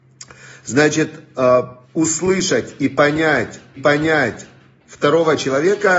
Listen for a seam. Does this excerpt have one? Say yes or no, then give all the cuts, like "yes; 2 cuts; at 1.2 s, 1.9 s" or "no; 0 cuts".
yes; 2 cuts; at 1.8 s, 3.8 s